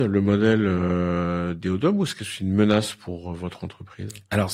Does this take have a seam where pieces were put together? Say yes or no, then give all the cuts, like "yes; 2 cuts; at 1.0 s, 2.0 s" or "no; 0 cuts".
no; 0 cuts